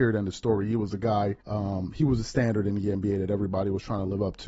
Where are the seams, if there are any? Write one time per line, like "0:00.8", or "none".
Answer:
0:01.4